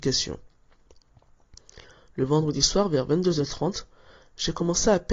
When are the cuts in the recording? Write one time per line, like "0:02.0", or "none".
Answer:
none